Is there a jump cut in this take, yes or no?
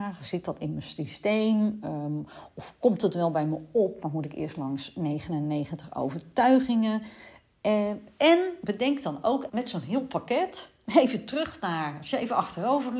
yes